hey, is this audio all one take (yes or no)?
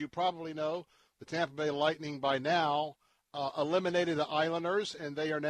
yes